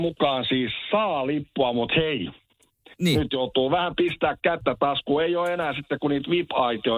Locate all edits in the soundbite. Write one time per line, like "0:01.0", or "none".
none